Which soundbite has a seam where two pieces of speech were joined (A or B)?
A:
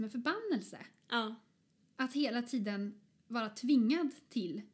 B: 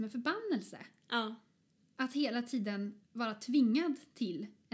B